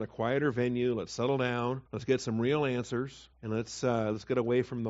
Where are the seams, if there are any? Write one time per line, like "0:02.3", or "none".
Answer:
0:01.9
0:03.3